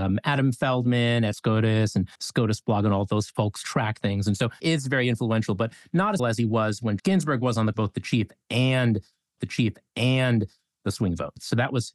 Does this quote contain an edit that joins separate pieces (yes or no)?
yes